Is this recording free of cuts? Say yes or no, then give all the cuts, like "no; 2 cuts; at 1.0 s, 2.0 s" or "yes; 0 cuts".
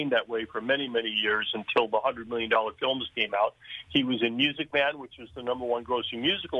yes; 0 cuts